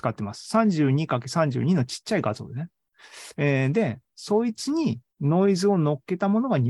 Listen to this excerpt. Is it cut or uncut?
cut